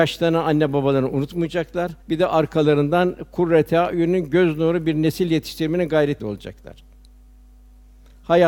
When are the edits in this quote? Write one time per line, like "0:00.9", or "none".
0:02.0
0:06.2